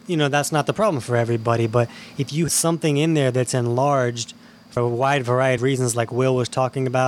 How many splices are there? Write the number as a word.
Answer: three